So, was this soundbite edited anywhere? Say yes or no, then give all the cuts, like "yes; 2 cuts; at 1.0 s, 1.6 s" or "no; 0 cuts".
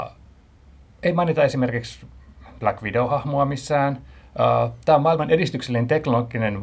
no; 0 cuts